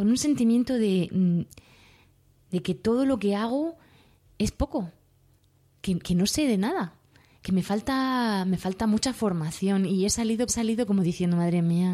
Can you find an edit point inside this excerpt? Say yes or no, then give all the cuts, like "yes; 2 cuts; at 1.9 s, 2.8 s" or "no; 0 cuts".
yes; 3 cuts; at 2.6 s, 6.0 s, 10.5 s